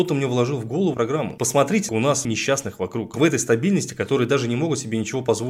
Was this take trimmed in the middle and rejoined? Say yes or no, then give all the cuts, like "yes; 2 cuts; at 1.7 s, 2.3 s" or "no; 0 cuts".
yes; 4 cuts; at 0.9 s, 1.9 s, 2.2 s, 3.1 s